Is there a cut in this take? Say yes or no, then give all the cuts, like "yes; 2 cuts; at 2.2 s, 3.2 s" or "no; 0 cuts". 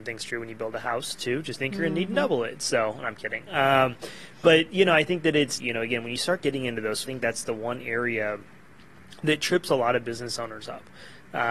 yes; 3 cuts; at 1.6 s, 5.6 s, 7.1 s